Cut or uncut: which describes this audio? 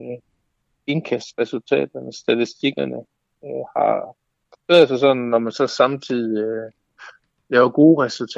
uncut